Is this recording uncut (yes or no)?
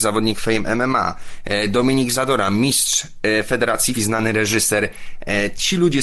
no